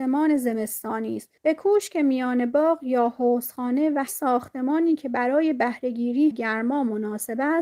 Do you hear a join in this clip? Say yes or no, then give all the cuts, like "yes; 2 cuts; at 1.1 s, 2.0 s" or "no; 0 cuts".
yes; 3 cuts; at 1.4 s, 4.1 s, 6.3 s